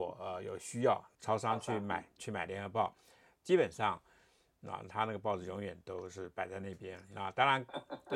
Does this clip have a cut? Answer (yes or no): yes